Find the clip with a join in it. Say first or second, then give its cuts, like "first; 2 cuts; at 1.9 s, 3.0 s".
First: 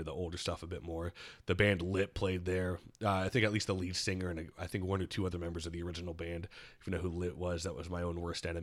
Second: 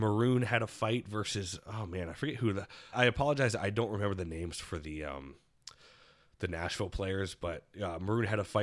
second; 1 cut; at 2.9 s